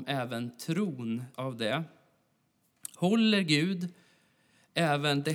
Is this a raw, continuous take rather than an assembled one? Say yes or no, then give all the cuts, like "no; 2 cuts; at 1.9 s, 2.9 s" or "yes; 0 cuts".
no; 1 cut; at 1.3 s